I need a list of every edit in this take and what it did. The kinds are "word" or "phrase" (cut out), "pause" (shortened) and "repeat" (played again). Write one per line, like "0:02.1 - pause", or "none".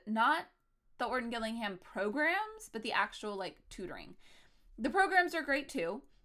none

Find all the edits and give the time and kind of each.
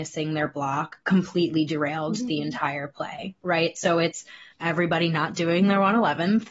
0:04.5 - pause

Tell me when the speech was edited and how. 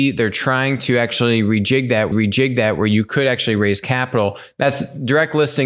0:02.1 - repeat

